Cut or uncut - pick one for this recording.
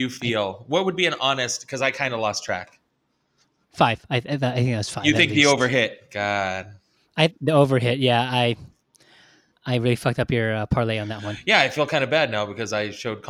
uncut